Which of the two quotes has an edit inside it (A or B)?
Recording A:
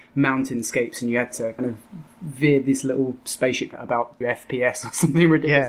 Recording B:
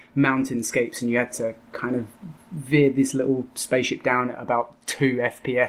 A